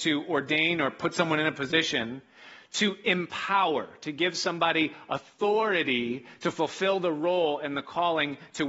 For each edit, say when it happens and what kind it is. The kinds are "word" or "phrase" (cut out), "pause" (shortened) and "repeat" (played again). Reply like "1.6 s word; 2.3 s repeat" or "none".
none